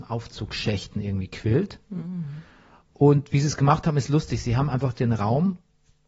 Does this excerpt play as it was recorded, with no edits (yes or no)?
yes